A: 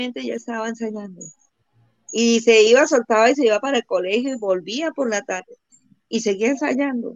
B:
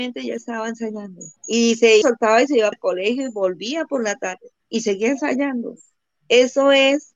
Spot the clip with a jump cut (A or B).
B